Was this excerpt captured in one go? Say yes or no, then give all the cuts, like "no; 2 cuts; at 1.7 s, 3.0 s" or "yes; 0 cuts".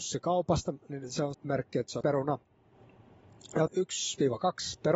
no; 3 cuts; at 1.3 s, 2.0 s, 3.7 s